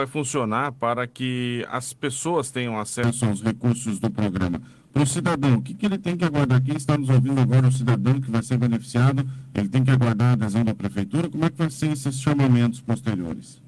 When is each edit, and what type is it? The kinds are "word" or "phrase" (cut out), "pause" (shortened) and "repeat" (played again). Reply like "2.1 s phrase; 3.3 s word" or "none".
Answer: none